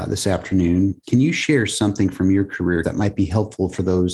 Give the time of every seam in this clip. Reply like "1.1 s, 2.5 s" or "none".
1.0 s, 2.8 s